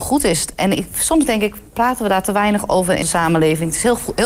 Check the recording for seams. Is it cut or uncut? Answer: cut